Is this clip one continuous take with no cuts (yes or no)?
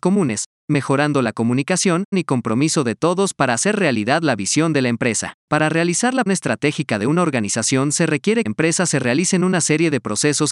no